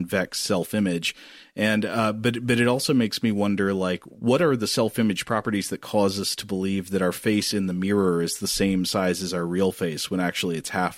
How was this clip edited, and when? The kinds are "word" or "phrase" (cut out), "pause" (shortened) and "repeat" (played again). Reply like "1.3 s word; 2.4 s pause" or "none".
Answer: none